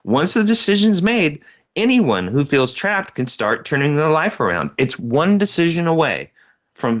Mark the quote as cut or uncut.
uncut